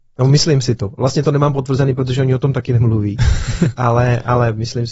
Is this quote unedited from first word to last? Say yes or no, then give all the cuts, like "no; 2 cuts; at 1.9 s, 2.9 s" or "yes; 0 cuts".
yes; 0 cuts